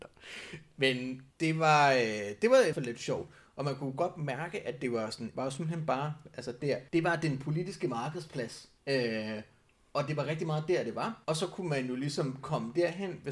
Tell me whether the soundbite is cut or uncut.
cut